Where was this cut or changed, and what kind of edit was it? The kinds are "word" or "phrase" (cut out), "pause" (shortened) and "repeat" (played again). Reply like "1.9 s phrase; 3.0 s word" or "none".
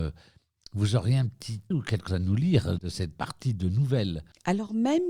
1.7 s word; 2.1 s word; 2.8 s word; 3.2 s word